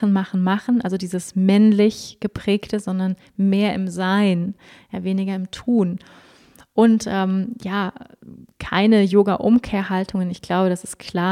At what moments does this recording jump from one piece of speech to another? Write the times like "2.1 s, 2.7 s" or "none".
none